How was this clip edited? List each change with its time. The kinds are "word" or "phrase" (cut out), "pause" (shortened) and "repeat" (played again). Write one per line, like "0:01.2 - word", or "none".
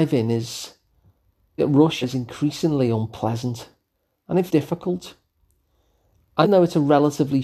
0:01.6 - word
0:02.0 - word
0:04.5 - word
0:06.4 - word